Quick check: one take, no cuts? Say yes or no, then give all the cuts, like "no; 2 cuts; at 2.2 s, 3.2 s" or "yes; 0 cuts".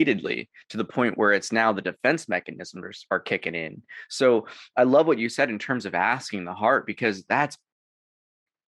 yes; 0 cuts